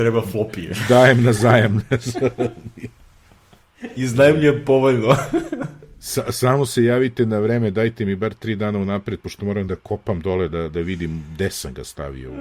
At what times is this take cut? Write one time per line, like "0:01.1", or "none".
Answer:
none